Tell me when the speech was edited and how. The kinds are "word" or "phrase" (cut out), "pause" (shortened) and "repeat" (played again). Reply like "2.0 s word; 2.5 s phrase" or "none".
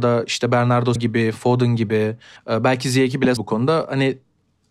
1.0 s word; 2.4 s pause; 3.4 s word